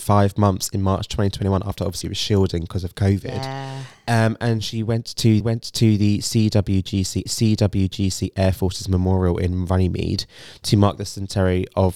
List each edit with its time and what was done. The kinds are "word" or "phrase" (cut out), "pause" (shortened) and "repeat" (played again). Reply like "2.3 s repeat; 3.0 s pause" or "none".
2.0 s word; 5.4 s repeat; 7.3 s repeat